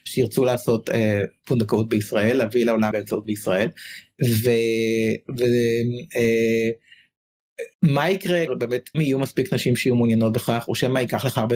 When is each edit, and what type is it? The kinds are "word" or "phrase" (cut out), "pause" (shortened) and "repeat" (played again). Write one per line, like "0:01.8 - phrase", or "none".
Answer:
0:02.9 - word
0:03.2 - word
0:07.7 - pause
0:08.5 - word
0:08.9 - phrase